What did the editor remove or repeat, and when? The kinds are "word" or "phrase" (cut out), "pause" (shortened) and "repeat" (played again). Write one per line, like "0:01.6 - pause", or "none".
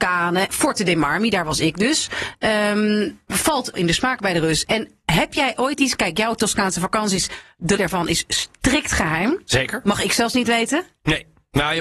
0:03.7 - word
0:07.8 - word